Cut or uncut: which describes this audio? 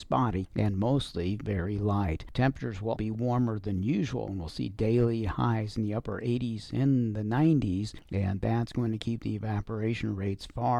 cut